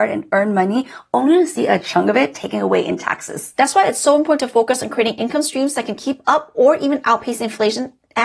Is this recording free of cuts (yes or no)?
yes